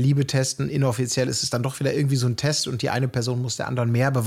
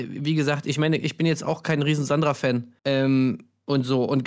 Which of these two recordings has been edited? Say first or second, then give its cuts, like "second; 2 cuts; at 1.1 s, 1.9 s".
second; 1 cut; at 2.8 s